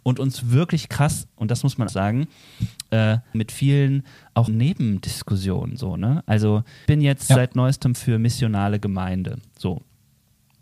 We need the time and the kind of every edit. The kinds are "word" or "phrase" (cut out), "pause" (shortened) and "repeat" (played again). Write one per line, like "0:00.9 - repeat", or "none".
0:01.9 - word
0:03.3 - word
0:04.5 - word
0:06.9 - word
0:07.9 - word